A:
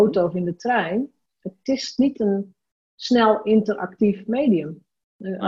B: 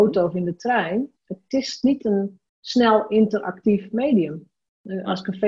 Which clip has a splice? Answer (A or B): B